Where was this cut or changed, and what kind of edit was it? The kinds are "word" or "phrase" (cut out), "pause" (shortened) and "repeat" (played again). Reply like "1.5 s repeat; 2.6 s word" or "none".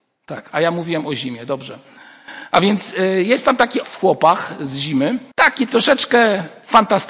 3.8 s word; 5.3 s pause